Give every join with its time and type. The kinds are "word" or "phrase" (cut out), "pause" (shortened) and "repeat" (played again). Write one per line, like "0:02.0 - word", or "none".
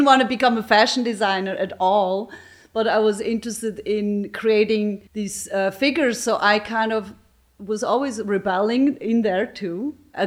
0:05.1 - pause